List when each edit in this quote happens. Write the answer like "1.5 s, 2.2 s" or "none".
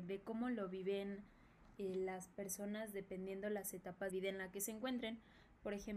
4.1 s